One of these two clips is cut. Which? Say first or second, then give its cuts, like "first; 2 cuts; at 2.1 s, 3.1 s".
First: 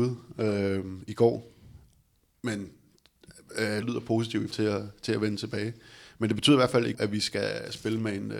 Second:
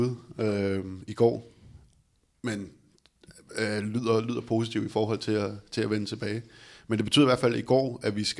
first; 3 cuts; at 3.8 s, 4.5 s, 6.9 s